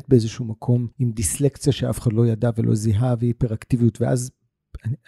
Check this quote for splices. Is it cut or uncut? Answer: cut